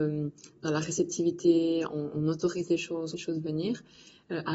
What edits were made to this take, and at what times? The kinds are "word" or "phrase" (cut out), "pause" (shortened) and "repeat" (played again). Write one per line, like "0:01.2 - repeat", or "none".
0:03.1 - phrase